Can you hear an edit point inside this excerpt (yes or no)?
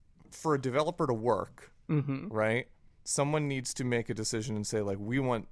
no